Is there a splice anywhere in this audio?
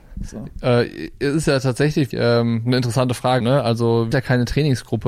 yes; 3 cuts; at 2.1 s, 3.4 s, 4.1 s

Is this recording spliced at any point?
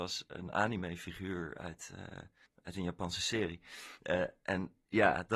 yes; 1 cut; at 2.5 s

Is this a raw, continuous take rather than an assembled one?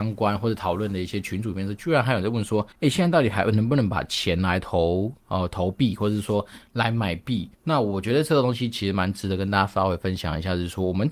no; 2 cuts; at 2.7 s, 7.5 s

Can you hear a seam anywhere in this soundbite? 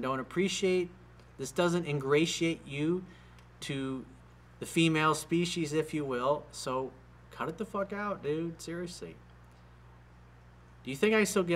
no; 0 cuts

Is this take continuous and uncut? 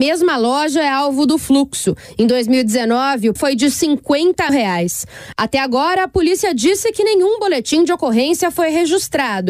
no; 2 cuts; at 3.4 s, 4.5 s

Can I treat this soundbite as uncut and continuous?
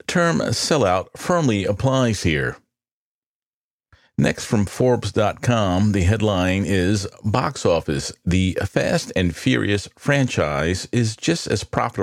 yes; 0 cuts

